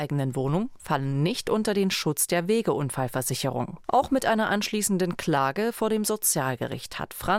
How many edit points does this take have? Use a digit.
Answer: 1